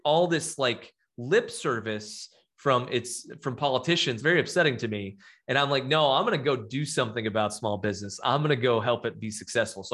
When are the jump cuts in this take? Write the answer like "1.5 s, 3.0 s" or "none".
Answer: 4.2 s